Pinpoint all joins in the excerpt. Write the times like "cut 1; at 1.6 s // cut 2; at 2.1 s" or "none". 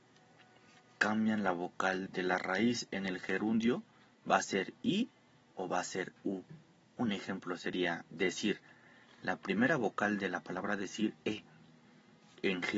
cut 1; at 2.1 s // cut 2; at 11.2 s